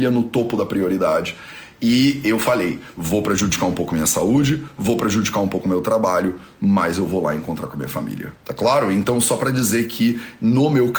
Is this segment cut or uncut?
cut